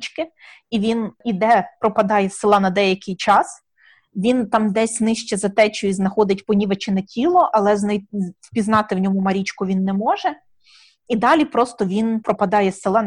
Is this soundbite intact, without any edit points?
yes; 0 cuts

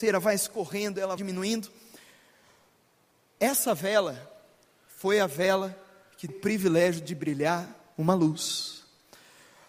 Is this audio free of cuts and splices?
no; 2 cuts; at 1.2 s, 6.3 s

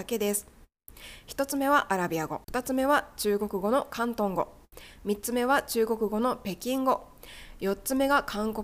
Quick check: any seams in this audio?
yes; 1 cut; at 2.4 s

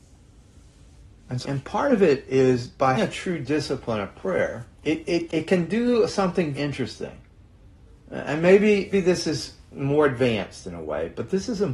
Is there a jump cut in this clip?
yes; 7 cuts; at 1.4 s, 2.9 s, 4.7 s, 5.3 s, 6.5 s, 7.9 s, 8.9 s

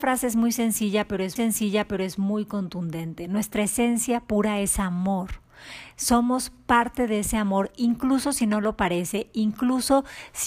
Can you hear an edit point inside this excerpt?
yes; 1 cut; at 1.4 s

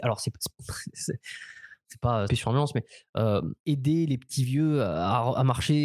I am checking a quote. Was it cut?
yes; 2 cuts; at 2.3 s, 3.6 s

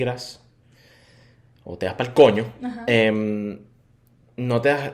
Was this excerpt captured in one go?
yes; 0 cuts

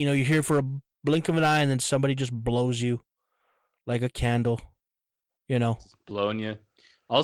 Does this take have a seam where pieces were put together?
no; 0 cuts

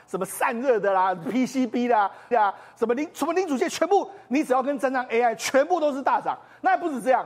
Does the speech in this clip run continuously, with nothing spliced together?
no; 1 cut; at 2.3 s

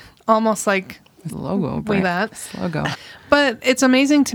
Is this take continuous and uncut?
no; 3 cuts; at 1.3 s, 2.0 s, 2.9 s

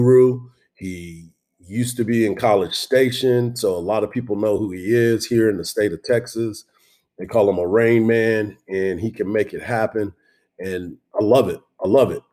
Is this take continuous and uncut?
yes; 0 cuts

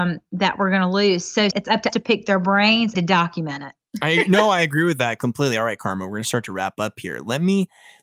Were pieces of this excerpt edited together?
yes; 3 cuts; at 1.5 s, 1.9 s, 2.9 s

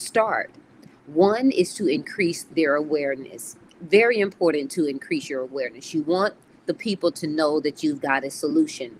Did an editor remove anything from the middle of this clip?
no; 0 cuts

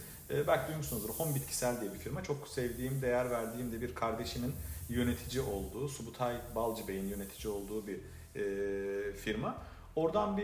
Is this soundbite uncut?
yes; 0 cuts

